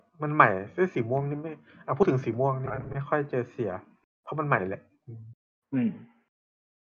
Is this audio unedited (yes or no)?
no